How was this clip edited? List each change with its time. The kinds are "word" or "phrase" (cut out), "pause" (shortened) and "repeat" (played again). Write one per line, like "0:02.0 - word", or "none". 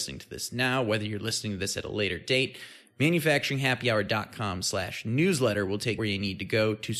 0:06.0 - phrase